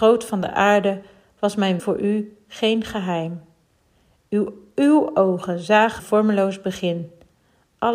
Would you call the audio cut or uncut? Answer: cut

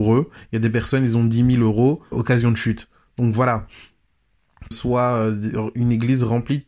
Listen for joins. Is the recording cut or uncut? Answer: cut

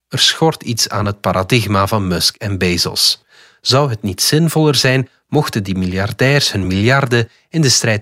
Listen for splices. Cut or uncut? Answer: uncut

